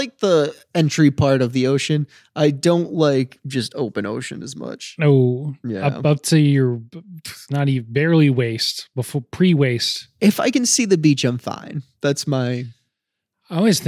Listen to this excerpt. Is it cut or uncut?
uncut